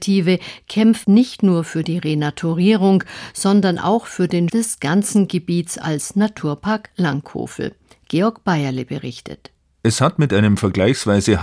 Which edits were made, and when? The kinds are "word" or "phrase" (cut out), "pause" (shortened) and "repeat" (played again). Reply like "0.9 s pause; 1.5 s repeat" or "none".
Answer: 1.0 s word; 4.5 s word